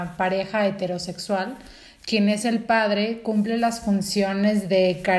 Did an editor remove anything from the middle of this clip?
no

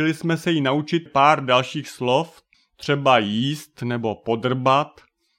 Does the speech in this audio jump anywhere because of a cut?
yes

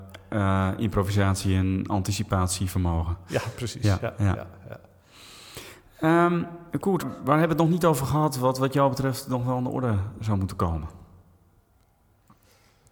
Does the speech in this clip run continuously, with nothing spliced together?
no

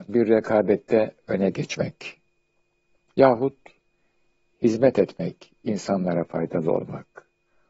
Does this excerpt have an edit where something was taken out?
no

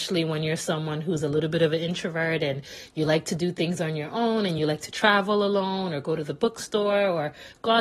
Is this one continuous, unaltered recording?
yes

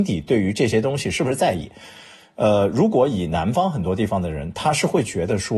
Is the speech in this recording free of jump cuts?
yes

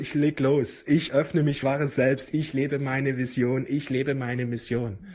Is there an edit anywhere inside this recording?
yes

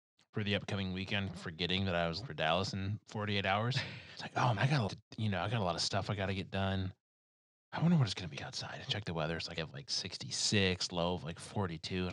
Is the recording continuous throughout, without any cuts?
no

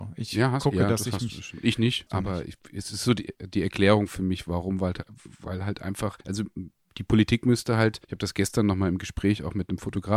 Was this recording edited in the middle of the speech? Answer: yes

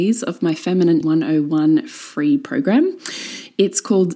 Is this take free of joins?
no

